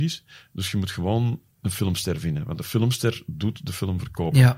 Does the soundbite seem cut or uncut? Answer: cut